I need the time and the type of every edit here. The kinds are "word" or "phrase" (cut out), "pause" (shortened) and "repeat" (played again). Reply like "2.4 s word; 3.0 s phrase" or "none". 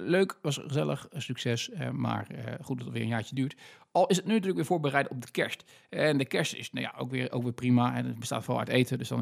none

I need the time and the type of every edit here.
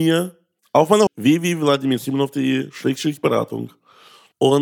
1.1 s word

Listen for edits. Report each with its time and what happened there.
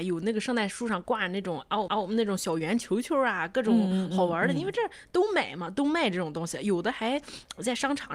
1.9 s repeat

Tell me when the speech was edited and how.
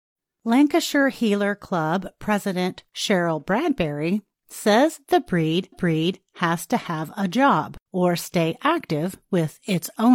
5.7 s repeat; 7.9 s pause

